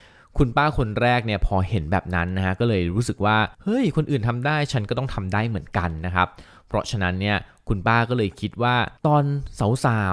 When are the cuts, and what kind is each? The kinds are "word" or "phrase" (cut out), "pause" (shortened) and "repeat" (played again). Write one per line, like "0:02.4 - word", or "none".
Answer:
0:03.5 - pause
0:09.0 - pause